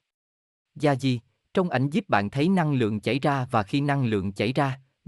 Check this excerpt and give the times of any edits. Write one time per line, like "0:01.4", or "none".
none